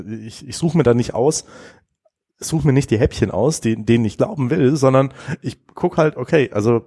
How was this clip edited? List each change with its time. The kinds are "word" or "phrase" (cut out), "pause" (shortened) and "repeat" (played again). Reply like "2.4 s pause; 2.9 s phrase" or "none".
none